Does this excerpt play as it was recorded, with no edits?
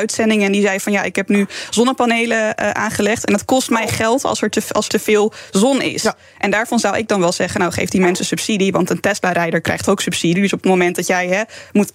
no; 1 cut; at 4.9 s

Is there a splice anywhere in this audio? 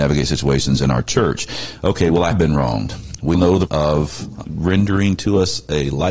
yes; 4 cuts; at 2.3 s, 3.3 s, 3.7 s, 4.4 s

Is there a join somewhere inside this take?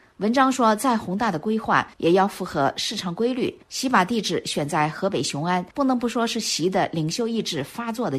yes; 3 cuts; at 1.9 s, 3.6 s, 5.7 s

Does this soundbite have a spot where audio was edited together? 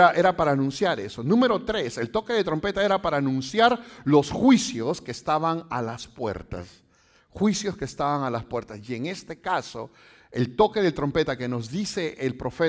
no; 0 cuts

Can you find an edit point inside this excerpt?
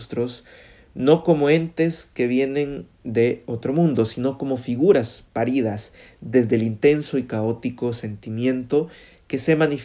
no; 0 cuts

